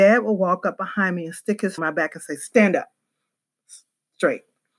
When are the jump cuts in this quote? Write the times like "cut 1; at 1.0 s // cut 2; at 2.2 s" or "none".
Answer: cut 1; at 1.8 s

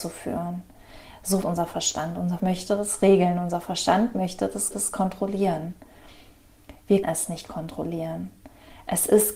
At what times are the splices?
cut 1; at 1.4 s // cut 2; at 2.4 s // cut 3; at 4.7 s // cut 4; at 7.0 s

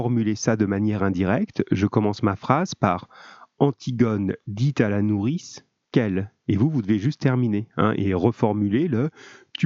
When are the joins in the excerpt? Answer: none

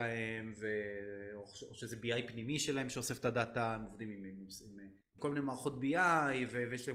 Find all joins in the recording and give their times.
cut 1; at 5.0 s

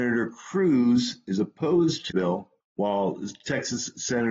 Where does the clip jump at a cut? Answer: cut 1; at 2.1 s // cut 2; at 2.6 s

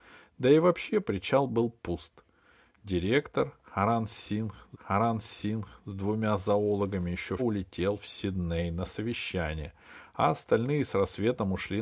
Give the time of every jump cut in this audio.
cut 1; at 4.7 s // cut 2; at 7.4 s

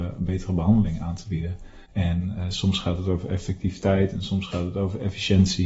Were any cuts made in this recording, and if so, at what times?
cut 1; at 1.8 s

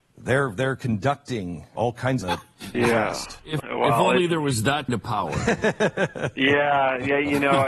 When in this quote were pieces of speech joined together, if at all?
cut 1; at 1.8 s // cut 2; at 2.2 s // cut 3; at 2.7 s // cut 4; at 3.6 s // cut 5; at 4.9 s

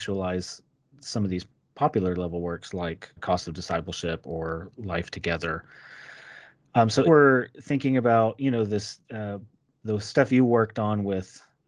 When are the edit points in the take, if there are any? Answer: cut 1; at 3.2 s // cut 2; at 7.1 s // cut 3; at 9.0 s

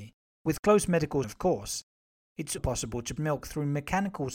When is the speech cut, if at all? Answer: cut 1; at 1.2 s // cut 2; at 2.6 s // cut 3; at 3.2 s

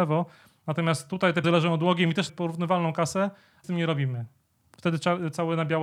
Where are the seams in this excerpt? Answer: cut 1; at 1.4 s // cut 2; at 2.3 s // cut 3; at 3.6 s

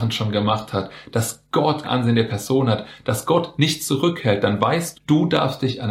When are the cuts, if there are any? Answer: cut 1; at 1.8 s // cut 2; at 4.9 s

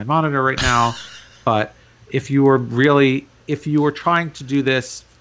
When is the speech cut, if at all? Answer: none

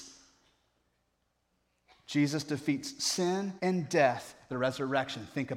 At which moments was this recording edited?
cut 1; at 3.6 s // cut 2; at 4.5 s

